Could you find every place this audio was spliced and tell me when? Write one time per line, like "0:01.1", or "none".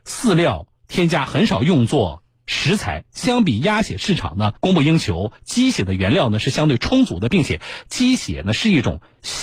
0:04.6

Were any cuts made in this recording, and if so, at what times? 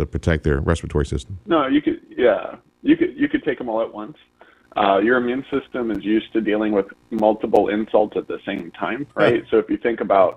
0:09.1

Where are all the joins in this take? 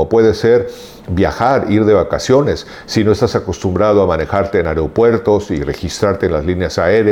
none

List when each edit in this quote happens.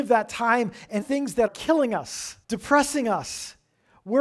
0:01.0
0:01.5
0:02.4

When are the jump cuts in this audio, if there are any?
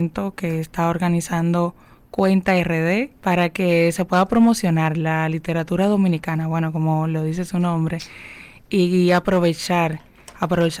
0:03.2

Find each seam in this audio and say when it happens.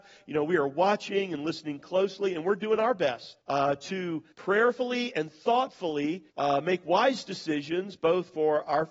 0:03.4
0:04.3
0:06.3

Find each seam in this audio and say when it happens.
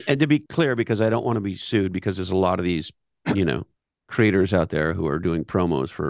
0:03.7

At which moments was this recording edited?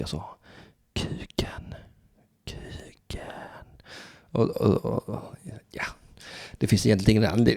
none

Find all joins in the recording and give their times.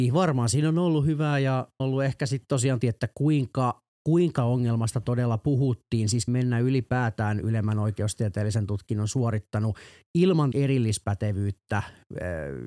0:01.8
0:02.8
0:04.4
0:06.3
0:10.5

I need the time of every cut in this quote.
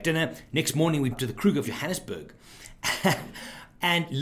0:01.1
0:01.6

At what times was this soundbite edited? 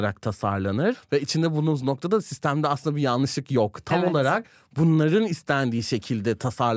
none

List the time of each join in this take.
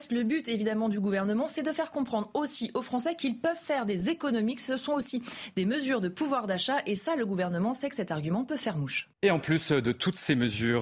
0:09.1

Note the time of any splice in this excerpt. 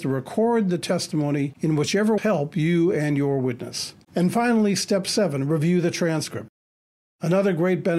0:02.2
0:04.0

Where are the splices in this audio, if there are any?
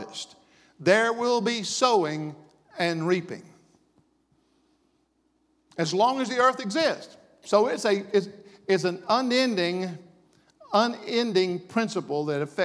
none

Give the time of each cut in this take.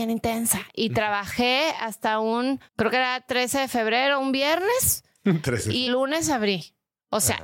0:02.7
0:05.9

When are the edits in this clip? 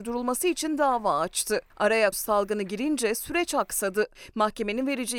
0:02.1

